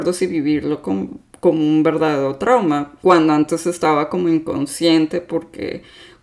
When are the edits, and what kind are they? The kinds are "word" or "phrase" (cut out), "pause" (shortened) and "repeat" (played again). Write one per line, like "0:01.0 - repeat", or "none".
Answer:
none